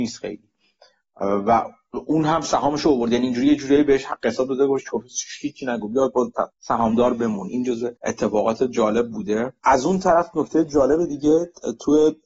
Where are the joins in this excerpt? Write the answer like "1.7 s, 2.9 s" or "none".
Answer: 6.5 s, 8.0 s, 9.6 s